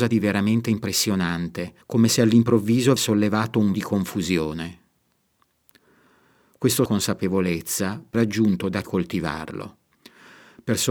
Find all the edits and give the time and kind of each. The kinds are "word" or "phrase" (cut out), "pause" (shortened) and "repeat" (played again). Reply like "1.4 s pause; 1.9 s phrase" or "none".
1.8 s pause; 3.0 s word; 3.7 s word; 6.9 s phrase; 8.1 s word; 8.8 s phrase